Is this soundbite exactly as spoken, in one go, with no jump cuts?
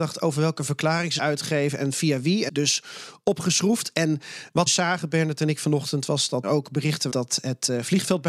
no; 5 cuts; at 1.2 s, 2.5 s, 4.7 s, 6.4 s, 7.1 s

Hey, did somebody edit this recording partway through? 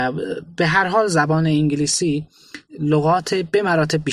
yes; 1 cut; at 2.7 s

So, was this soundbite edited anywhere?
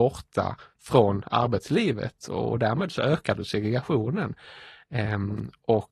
no; 0 cuts

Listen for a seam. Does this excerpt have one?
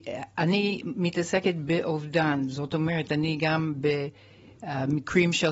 no; 0 cuts

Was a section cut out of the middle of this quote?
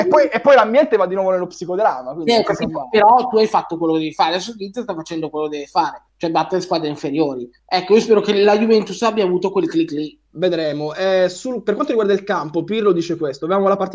yes; 3 cuts; at 6.1 s, 7.6 s, 10.3 s

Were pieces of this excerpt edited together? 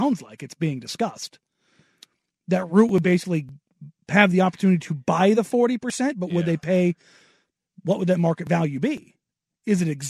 no; 0 cuts

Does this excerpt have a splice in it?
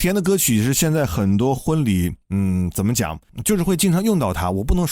no; 0 cuts

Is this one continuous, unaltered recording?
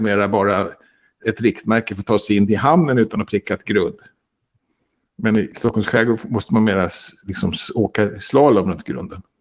yes; 0 cuts

